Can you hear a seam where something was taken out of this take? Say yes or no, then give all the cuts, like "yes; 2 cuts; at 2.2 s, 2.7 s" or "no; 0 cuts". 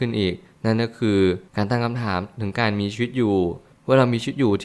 yes; 1 cut; at 1.5 s